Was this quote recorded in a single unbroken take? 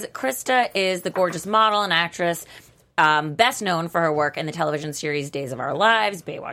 yes; 0 cuts

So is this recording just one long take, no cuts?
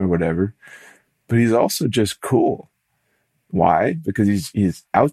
yes; 0 cuts

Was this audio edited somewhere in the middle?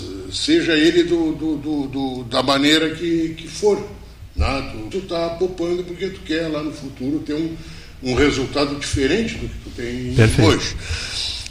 yes; 1 cut; at 4.9 s

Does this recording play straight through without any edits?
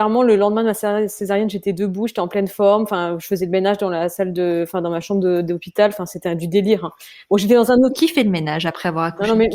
yes; 0 cuts

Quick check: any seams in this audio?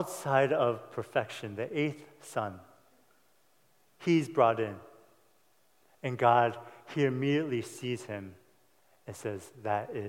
no; 0 cuts

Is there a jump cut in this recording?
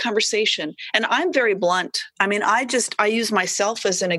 yes; 1 cut; at 2.1 s

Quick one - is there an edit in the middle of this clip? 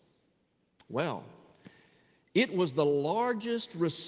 no; 0 cuts

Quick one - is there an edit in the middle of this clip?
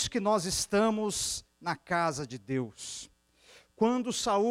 no; 0 cuts

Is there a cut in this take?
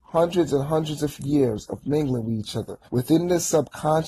yes; 1 cut; at 2.9 s

